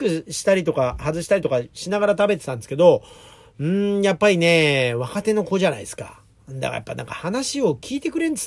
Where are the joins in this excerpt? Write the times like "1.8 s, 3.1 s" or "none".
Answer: none